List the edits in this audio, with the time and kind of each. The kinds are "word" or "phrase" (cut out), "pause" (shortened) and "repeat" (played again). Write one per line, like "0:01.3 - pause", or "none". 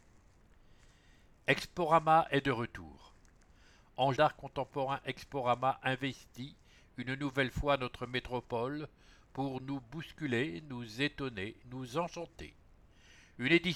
0:04.2 - phrase
0:11.6 - pause